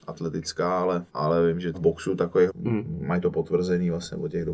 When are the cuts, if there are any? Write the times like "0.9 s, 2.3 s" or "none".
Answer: 1.1 s, 1.7 s, 2.5 s